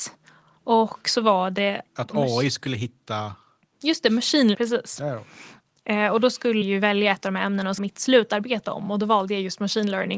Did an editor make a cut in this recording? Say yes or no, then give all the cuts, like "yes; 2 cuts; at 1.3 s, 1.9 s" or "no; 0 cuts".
yes; 3 cuts; at 4.5 s, 6.6 s, 7.8 s